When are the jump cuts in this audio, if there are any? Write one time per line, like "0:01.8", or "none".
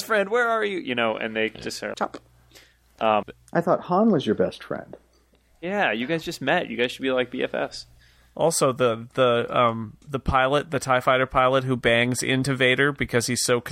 0:01.9
0:03.2
0:10.0